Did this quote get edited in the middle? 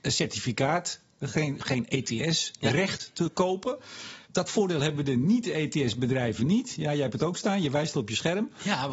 yes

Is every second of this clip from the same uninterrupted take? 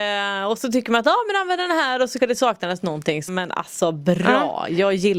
no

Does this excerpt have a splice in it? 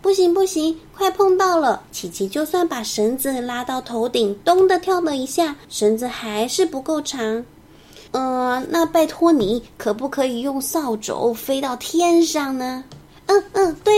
yes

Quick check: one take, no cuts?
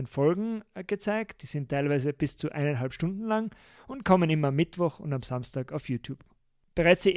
yes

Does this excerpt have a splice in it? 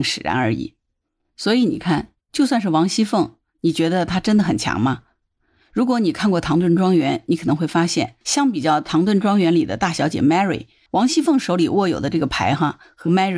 yes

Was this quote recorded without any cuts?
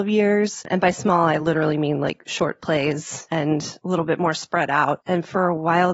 yes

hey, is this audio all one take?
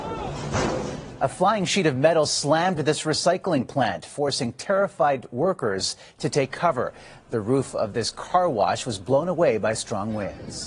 yes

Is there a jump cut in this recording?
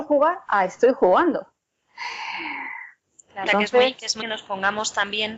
yes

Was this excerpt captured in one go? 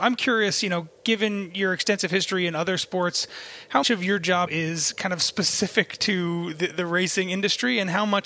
no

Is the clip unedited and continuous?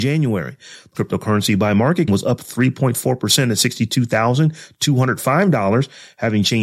no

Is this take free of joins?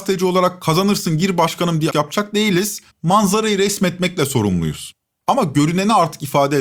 no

